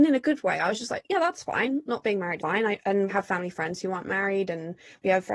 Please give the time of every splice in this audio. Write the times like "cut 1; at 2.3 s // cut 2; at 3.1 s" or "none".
cut 1; at 2.4 s // cut 2; at 3.1 s